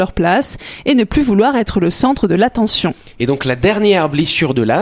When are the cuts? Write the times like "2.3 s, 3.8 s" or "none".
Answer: none